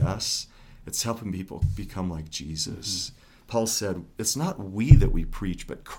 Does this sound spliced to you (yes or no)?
no